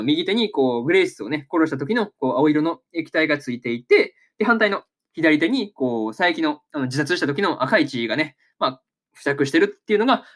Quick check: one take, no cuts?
yes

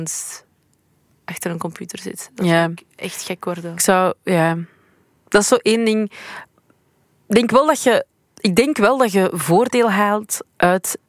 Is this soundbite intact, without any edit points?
yes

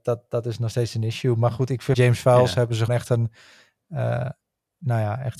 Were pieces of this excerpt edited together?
yes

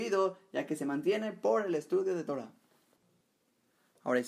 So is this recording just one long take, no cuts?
yes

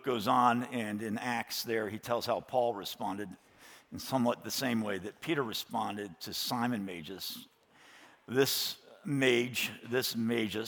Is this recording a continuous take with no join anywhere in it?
no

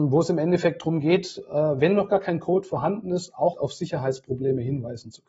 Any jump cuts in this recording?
yes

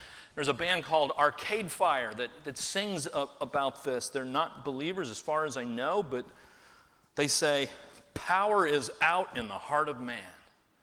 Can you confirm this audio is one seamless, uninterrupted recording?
yes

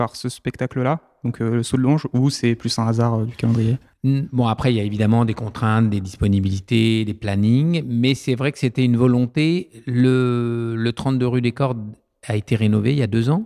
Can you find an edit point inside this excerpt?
no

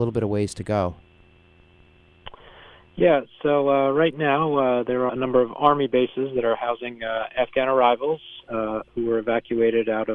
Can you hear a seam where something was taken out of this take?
yes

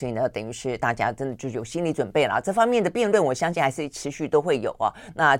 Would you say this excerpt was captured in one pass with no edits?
yes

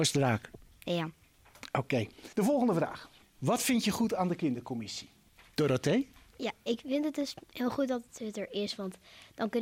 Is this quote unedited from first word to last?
no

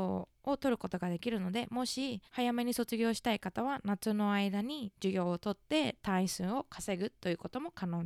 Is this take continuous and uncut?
no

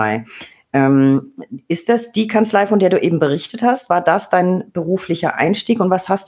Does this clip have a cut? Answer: no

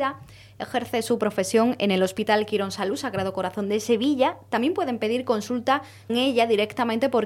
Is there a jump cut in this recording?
yes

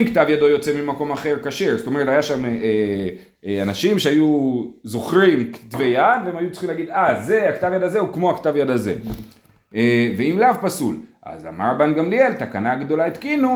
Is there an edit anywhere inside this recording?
no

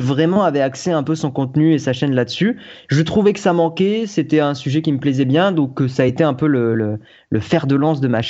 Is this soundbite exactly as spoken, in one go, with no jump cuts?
yes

